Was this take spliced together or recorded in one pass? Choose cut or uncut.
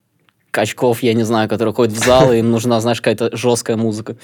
uncut